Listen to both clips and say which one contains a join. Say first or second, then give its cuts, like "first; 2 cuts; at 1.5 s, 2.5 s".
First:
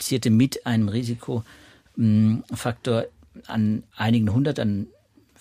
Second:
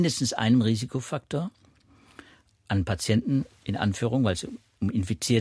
first; 1 cut; at 3.9 s